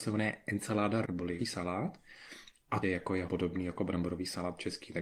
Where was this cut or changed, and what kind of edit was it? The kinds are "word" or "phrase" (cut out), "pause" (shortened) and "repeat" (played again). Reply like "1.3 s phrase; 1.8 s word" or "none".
1.0 s word; 1.4 s word; 2.8 s phrase; 3.3 s word